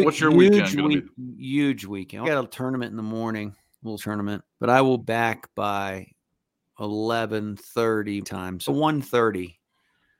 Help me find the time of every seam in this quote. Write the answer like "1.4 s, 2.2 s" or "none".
2.2 s, 4.0 s, 4.5 s, 5.0 s, 8.2 s, 8.7 s